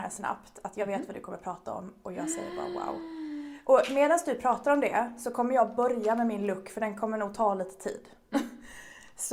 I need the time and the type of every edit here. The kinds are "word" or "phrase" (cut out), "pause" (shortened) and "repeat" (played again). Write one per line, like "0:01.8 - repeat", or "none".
none